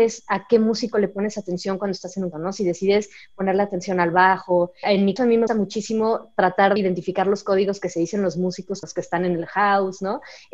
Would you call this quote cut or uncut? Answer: cut